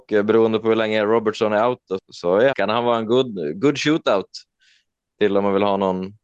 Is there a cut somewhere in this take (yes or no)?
yes